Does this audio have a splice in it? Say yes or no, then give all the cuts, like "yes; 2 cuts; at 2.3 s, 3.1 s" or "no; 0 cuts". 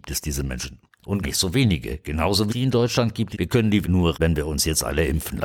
yes; 5 cuts; at 1.2 s, 2.5 s, 3.3 s, 3.8 s, 4.1 s